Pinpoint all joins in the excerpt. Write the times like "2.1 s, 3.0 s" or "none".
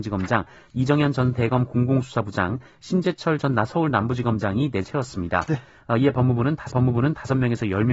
4.8 s, 6.7 s